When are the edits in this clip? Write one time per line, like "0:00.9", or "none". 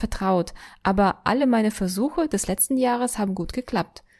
none